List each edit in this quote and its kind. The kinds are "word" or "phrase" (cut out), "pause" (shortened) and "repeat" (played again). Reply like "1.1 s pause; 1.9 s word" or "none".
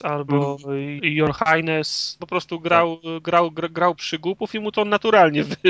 1.0 s word; 2.2 s word; 4.0 s word